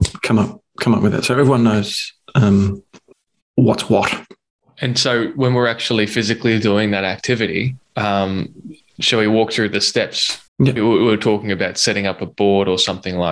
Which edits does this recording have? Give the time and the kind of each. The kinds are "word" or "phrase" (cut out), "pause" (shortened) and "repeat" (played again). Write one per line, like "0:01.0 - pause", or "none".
0:07.8 - pause
0:10.5 - pause